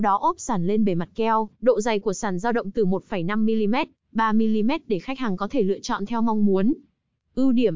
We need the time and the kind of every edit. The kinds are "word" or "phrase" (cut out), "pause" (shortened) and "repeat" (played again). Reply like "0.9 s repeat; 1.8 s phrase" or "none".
1.5 s pause